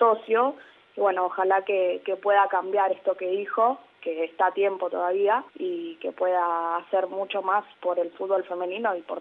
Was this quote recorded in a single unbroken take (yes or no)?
no